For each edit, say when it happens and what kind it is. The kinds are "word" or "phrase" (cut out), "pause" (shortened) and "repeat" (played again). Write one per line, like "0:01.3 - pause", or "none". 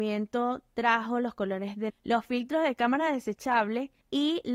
0:01.9 - word